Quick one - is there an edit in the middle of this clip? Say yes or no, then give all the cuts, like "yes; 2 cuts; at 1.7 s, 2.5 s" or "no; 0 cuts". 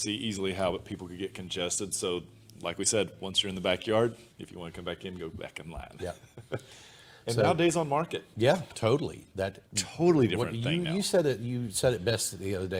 yes; 2 cuts; at 4.3 s, 9.7 s